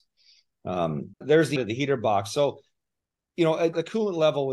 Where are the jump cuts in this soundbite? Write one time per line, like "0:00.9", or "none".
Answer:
0:01.1
0:01.6

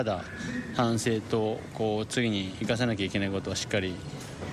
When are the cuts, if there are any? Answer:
none

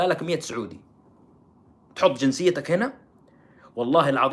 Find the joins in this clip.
none

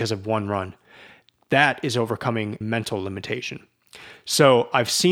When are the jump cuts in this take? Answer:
0:02.6

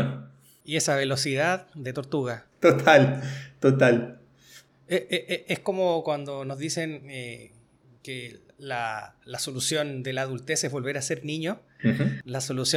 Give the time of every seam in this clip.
0:02.5
0:08.5

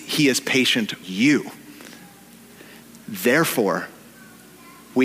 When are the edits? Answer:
0:01.0

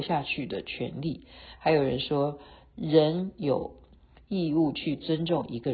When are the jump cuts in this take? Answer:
none

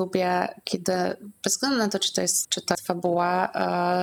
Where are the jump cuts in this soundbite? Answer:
0:02.4
0:02.7

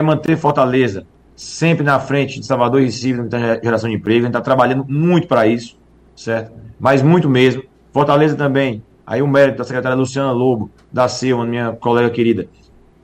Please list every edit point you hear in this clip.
none

